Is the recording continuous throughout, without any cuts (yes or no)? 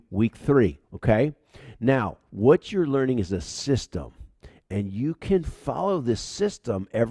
yes